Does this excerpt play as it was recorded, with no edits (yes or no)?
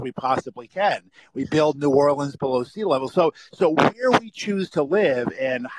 yes